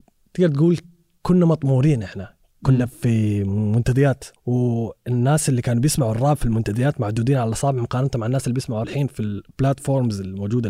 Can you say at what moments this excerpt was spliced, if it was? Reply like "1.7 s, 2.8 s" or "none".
4.4 s, 8.8 s